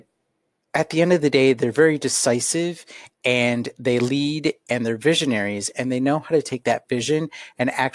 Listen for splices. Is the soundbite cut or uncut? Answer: uncut